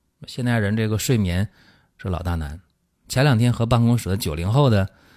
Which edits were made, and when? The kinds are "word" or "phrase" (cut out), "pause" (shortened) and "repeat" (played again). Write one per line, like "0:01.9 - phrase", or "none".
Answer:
none